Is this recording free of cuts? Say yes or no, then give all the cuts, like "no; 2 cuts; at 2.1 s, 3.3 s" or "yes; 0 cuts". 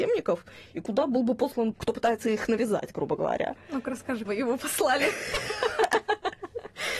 no; 2 cuts; at 1.7 s, 4.3 s